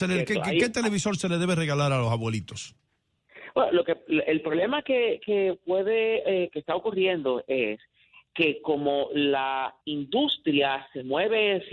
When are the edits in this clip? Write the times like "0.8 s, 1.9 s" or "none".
none

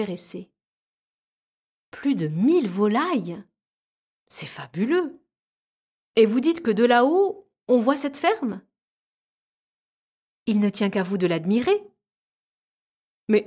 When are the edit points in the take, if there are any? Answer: none

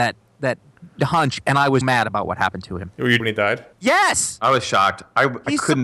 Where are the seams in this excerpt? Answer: 1.0 s, 1.8 s, 3.2 s, 3.7 s

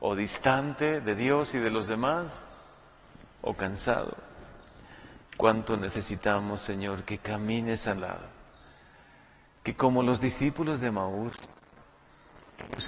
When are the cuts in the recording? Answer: 8.0 s

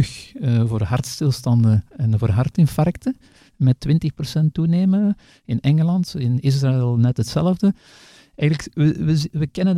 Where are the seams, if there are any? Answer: none

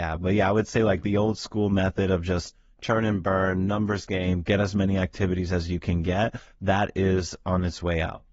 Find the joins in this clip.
none

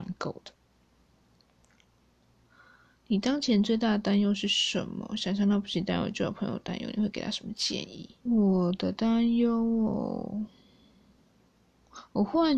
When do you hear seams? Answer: 8.2 s

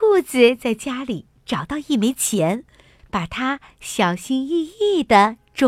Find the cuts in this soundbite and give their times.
none

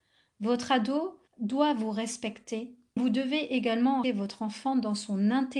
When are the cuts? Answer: 1.3 s, 3.0 s, 4.0 s

